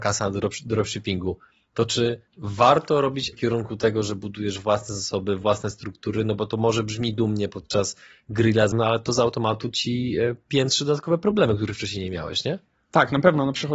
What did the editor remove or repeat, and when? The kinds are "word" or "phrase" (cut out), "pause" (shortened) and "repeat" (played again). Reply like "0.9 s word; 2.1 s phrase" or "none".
2.3 s pause; 3.3 s word; 8.7 s word